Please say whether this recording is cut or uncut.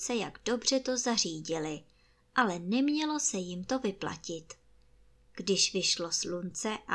uncut